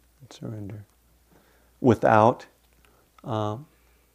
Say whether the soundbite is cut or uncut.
uncut